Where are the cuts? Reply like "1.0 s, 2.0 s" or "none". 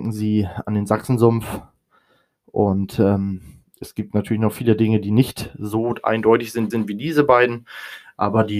6.7 s